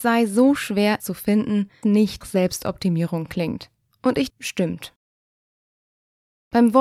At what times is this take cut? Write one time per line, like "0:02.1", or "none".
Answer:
0:01.0
0:01.8
0:02.2
0:03.9
0:04.3

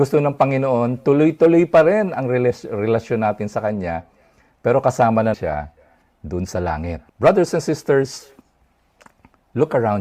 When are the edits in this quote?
0:05.3
0:07.1

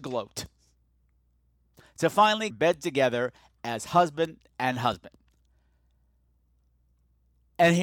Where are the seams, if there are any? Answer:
0:02.5

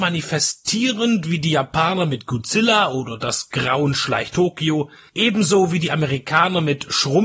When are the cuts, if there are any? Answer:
0:04.3

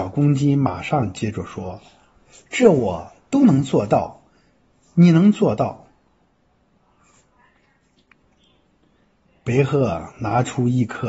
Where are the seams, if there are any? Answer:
none

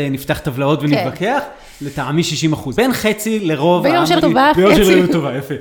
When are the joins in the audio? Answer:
0:02.8
0:04.2

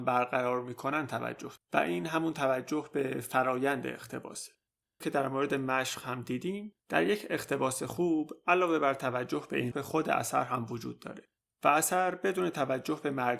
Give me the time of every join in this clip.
0:01.6
0:05.0
0:06.8
0:09.7

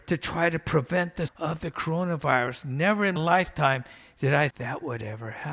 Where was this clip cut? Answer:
0:01.3
0:03.2
0:04.5

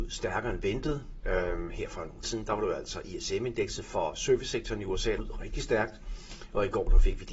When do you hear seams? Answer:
0:02.2
0:05.2

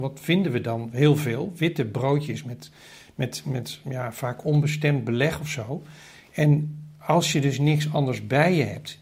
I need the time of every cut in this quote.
none

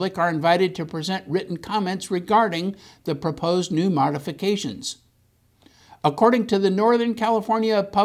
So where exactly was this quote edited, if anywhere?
none

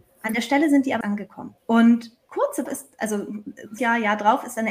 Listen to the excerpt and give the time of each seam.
0:01.0
0:01.6
0:02.7
0:03.8

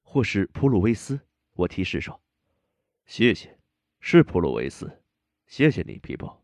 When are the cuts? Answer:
none

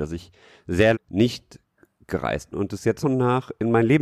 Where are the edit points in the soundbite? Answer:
0:00.9
0:02.5
0:03.0

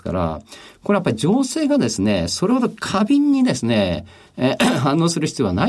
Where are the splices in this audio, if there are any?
none

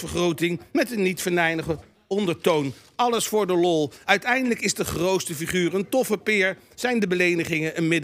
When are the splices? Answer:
none

